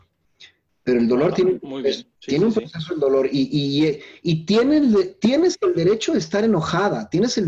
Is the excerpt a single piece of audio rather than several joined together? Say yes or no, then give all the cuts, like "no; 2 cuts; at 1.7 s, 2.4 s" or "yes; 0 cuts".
no; 1 cut; at 2.2 s